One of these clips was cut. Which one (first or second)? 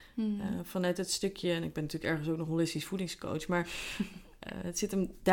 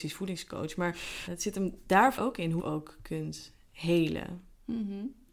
second